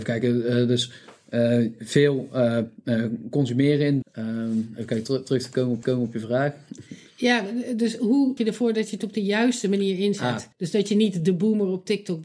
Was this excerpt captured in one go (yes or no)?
no